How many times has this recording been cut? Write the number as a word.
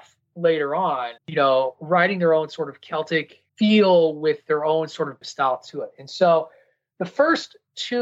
three